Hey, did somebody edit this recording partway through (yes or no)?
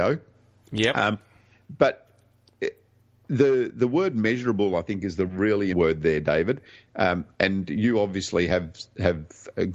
yes